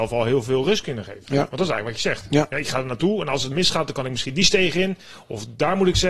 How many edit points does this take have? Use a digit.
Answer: 0